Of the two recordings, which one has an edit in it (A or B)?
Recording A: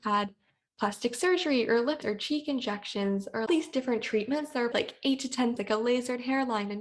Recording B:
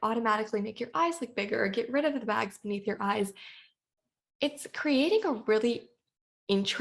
A